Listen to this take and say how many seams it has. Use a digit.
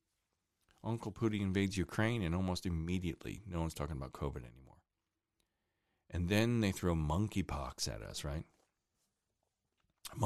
0